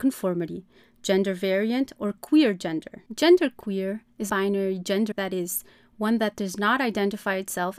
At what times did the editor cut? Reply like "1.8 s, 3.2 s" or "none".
3.1 s, 4.3 s, 5.1 s